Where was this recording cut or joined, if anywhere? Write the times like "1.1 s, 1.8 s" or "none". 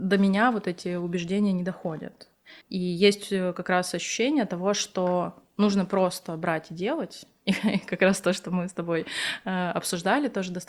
2.6 s